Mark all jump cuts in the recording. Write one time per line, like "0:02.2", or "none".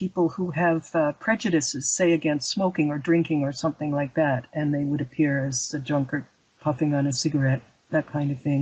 none